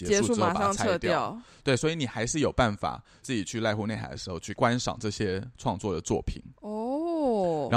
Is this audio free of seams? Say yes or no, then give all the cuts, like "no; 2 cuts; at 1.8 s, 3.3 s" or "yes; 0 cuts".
yes; 0 cuts